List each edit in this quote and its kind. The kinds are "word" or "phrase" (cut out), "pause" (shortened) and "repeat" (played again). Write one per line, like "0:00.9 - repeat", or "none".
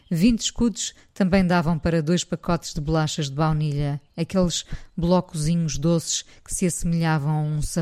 0:04.1 - pause